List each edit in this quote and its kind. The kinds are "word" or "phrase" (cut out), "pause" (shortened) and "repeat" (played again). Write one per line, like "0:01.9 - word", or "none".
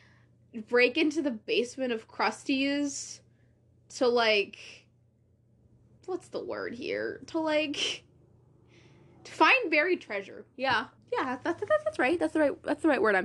0:06.0 - word
0:11.0 - word